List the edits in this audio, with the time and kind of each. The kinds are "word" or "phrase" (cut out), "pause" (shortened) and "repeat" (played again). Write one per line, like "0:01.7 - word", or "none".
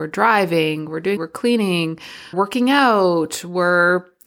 0:01.2 - word
0:02.3 - word